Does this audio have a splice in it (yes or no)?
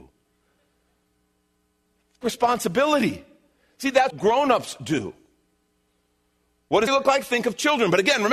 yes